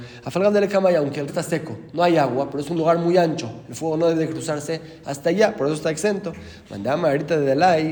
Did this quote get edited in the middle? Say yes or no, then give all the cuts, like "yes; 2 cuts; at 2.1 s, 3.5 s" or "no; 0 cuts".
yes; 1 cut; at 1.3 s